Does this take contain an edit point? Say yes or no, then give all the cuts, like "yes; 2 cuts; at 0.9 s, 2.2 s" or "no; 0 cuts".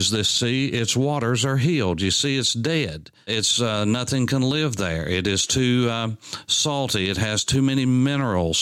no; 0 cuts